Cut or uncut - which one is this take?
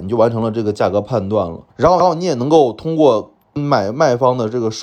cut